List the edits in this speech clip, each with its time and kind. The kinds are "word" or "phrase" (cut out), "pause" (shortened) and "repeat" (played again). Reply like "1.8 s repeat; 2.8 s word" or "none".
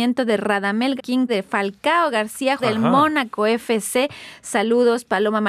1.0 s word; 1.3 s word; 2.6 s word